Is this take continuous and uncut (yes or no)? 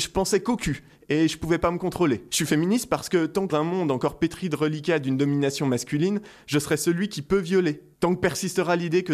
no